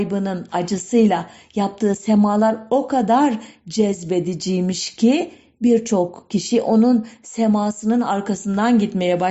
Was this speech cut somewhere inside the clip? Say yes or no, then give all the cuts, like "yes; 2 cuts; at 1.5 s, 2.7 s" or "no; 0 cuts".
no; 0 cuts